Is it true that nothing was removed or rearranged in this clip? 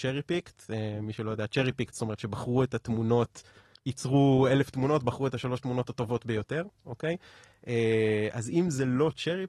yes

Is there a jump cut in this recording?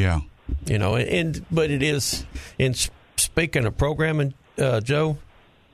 no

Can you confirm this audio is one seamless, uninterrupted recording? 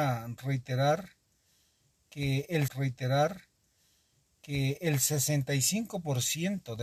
no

